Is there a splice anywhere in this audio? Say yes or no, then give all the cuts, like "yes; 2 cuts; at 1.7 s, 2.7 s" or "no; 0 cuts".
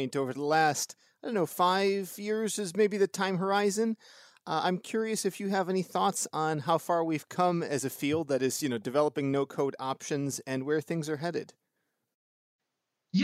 no; 0 cuts